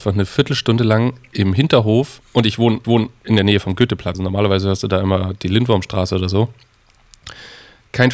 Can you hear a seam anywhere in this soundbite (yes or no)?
yes